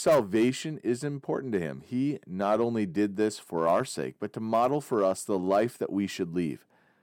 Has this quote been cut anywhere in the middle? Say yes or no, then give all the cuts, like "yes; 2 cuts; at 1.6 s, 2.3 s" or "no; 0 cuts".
no; 0 cuts